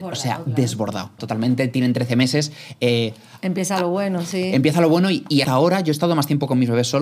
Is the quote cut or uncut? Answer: cut